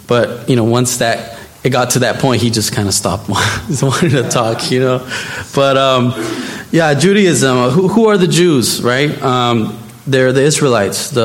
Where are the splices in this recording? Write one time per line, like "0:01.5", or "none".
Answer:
0:07.9